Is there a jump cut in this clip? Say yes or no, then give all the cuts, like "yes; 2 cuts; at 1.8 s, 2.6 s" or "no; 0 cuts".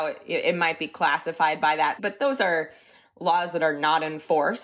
yes; 1 cut; at 2.0 s